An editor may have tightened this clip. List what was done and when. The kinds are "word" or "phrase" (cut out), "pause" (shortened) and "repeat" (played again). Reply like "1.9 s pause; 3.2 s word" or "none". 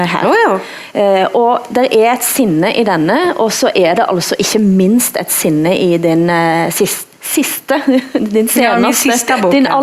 none

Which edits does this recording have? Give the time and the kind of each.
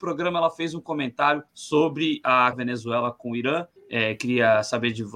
1.5 s pause; 2.5 s phrase; 3.8 s pause

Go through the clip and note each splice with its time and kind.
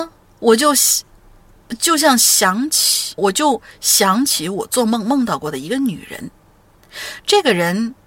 3.2 s word

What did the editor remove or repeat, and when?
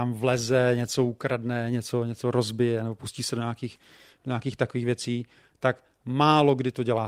none

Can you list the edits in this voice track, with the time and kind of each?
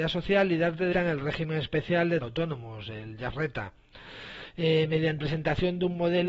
0.9 s word; 2.2 s word; 3.3 s word; 5.2 s word

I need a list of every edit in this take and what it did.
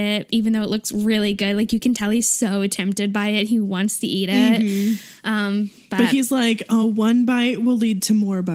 none

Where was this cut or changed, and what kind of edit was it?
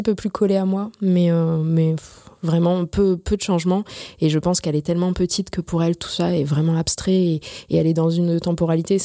none

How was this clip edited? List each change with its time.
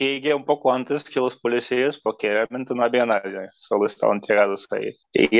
none

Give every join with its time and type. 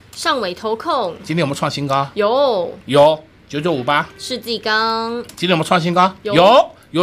none

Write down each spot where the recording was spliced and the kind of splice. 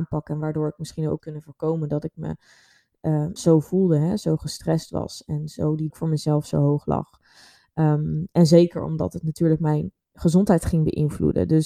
1.2 s word; 3.4 s word; 5.9 s word

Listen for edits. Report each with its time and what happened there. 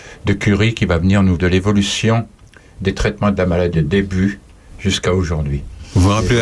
1.4 s word; 3.7 s word

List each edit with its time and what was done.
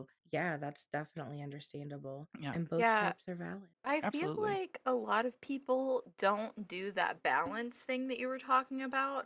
2.3 s pause; 3.7 s pause

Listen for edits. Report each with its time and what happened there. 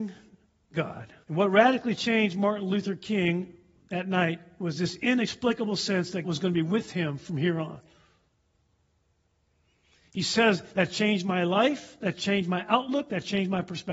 1.2 s pause; 6.2 s word

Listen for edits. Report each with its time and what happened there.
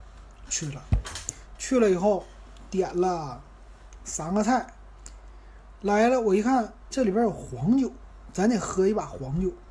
6.9 s word

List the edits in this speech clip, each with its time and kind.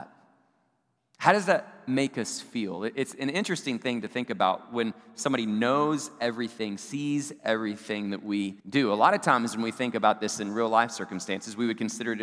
8.6 s pause

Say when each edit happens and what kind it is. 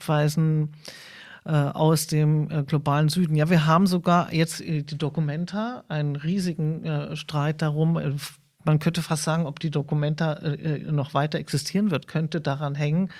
none

